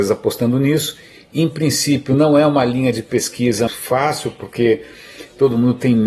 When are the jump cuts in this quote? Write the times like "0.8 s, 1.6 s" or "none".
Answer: 3.7 s

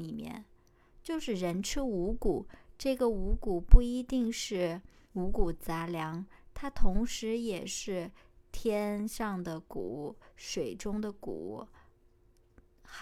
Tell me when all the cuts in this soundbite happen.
5.1 s

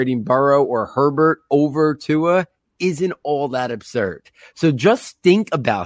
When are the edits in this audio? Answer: none

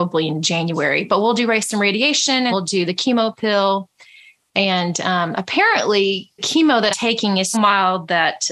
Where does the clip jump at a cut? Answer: 2.5 s, 6.4 s, 6.9 s, 7.5 s

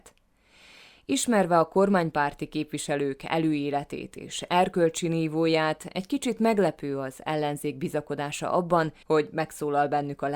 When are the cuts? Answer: 9.0 s

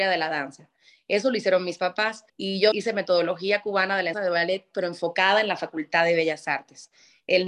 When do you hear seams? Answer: 2.3 s, 2.7 s, 4.1 s

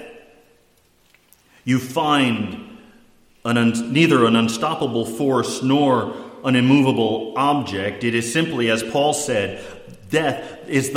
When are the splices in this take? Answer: none

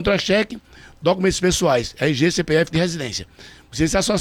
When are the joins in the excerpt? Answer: 2.7 s

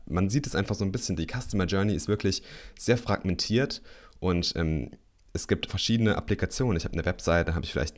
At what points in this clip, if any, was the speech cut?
5.7 s

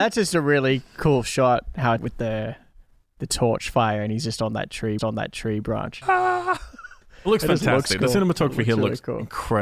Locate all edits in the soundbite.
2.0 s, 5.0 s, 6.0 s

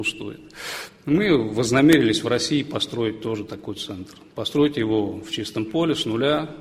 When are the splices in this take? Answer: none

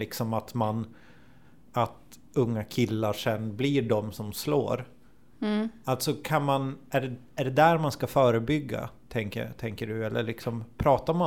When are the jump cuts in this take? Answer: none

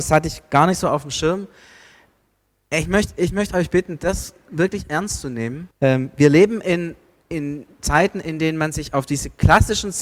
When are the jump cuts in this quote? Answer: 5.7 s

